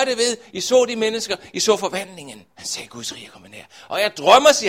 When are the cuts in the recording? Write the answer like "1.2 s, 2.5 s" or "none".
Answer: 2.5 s